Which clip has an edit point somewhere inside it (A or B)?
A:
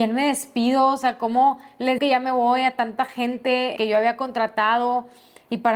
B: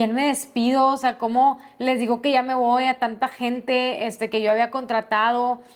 A